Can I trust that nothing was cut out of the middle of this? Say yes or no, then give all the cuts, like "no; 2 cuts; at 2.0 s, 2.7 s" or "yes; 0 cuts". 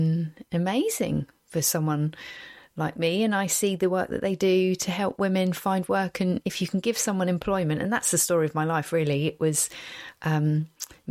yes; 0 cuts